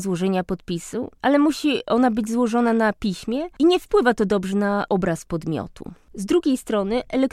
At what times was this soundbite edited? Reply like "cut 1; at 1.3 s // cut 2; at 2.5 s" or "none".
none